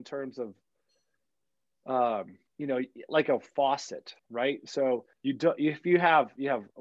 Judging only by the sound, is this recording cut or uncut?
cut